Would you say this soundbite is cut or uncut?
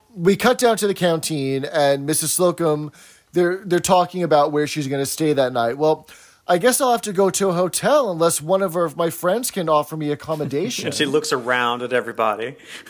uncut